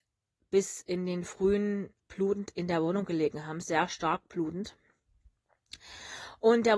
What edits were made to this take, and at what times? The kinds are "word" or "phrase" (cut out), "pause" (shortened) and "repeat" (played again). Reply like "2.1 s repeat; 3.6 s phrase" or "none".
2.0 s word